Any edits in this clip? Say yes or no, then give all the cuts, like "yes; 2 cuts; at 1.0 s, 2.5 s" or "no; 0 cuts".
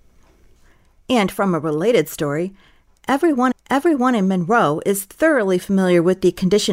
yes; 1 cut; at 3.5 s